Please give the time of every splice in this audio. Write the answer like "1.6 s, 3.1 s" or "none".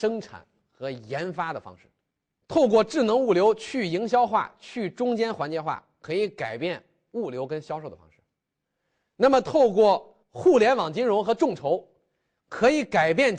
10.2 s

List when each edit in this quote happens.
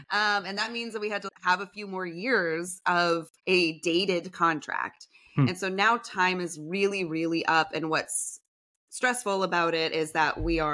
3.4 s

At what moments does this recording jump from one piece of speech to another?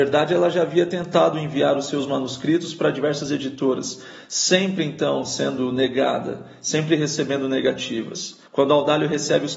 8.5 s

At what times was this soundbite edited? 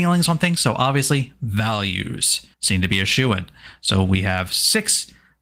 2.5 s

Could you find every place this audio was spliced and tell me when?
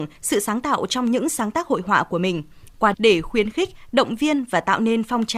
2.9 s

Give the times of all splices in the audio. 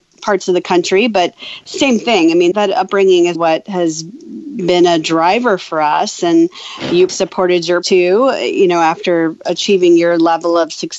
2.5 s, 3.3 s, 7.1 s, 7.8 s

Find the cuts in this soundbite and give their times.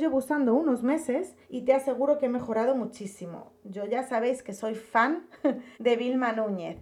1.4 s, 5.7 s

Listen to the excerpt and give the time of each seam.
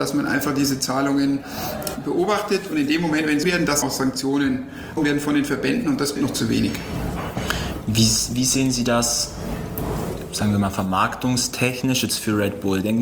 3.4 s, 3.8 s, 5.0 s, 6.2 s

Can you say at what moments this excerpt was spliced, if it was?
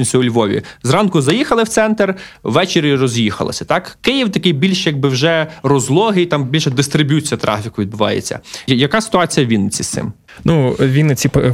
none

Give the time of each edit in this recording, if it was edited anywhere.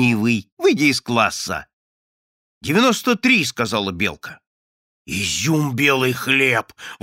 none

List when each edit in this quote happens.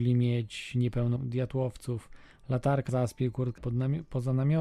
1.2 s, 2.9 s, 3.6 s

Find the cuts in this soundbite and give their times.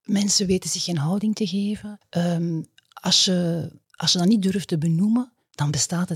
2.0 s

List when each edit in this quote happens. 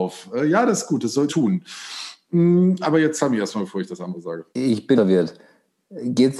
1.3 s, 4.5 s, 5.0 s

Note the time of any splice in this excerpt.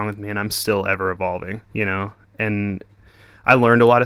1.6 s

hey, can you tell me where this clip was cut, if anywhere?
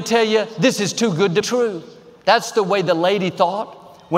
1.4 s

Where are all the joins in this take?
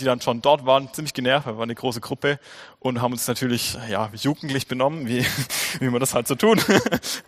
none

